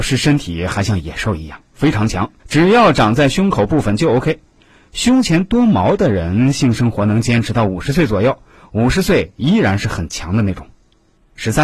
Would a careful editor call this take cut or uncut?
cut